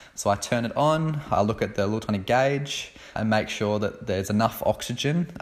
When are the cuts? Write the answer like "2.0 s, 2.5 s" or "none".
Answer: 3.2 s